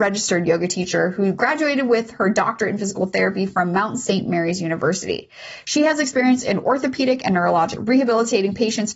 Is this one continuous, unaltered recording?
no; 1 cut; at 7.8 s

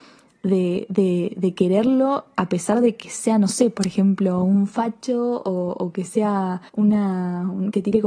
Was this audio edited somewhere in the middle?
yes; 1 cut; at 6.7 s

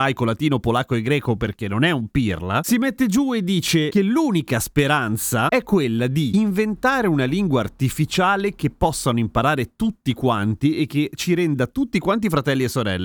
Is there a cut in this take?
no; 0 cuts

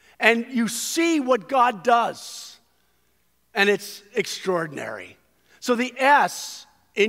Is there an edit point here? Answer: no; 0 cuts

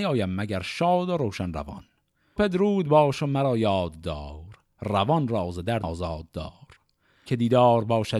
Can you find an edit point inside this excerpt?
yes; 3 cuts; at 2.4 s, 5.8 s, 7.3 s

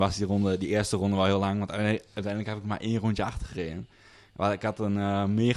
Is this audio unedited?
yes; 0 cuts

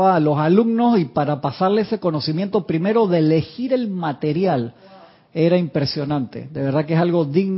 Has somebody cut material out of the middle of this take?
no; 0 cuts

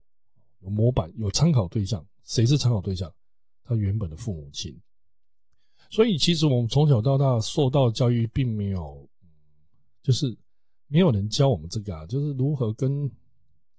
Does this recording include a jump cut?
no; 0 cuts

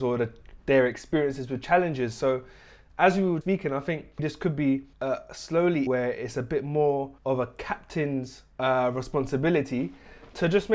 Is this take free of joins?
no; 6 cuts; at 3.4 s, 4.2 s, 4.9 s, 5.9 s, 7.2 s, 8.5 s

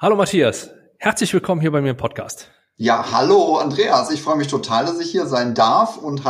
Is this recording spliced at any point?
no; 0 cuts

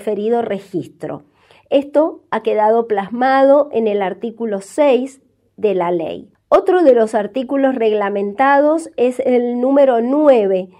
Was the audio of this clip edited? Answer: no; 0 cuts

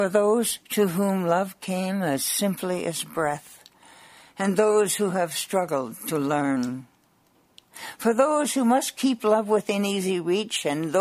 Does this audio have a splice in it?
no; 0 cuts

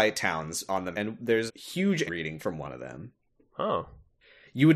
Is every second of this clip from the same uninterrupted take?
no; 4 cuts; at 0.9 s, 1.5 s, 2.1 s, 2.4 s

